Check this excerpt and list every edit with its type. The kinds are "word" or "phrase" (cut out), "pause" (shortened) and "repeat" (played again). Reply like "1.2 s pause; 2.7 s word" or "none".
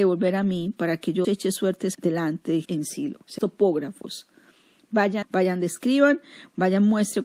1.2 s word; 1.9 s word; 2.6 s word; 3.4 s word; 5.2 s word

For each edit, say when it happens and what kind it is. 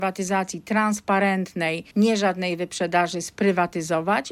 1.9 s pause

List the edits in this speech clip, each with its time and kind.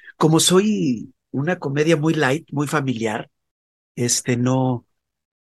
none

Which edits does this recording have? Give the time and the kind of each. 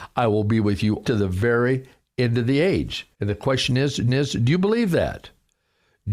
1.0 s word; 3.1 s pause; 4.1 s repeat

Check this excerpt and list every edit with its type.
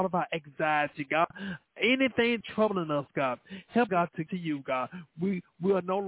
2.4 s phrase; 3.9 s word; 4.3 s word

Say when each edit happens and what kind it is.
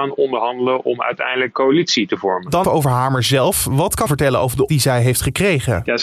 1.5 s word; 2.6 s word; 4.1 s word; 4.7 s word

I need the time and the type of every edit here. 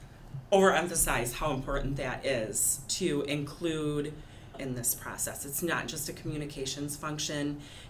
4.5 s phrase

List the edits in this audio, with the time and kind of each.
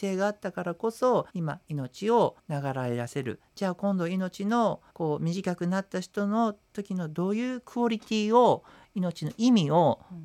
1.3 s pause; 2.4 s pause; 4.9 s pause; 6.6 s pause

